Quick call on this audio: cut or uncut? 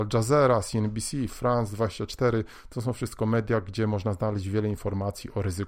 uncut